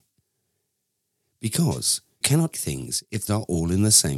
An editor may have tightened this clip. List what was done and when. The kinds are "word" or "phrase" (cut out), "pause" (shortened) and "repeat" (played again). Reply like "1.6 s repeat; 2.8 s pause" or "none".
2.2 s word; 2.5 s word; 3.3 s word